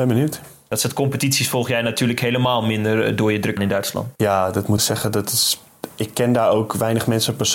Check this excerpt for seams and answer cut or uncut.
cut